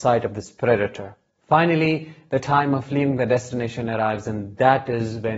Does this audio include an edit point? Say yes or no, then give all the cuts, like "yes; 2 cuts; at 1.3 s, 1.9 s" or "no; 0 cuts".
no; 0 cuts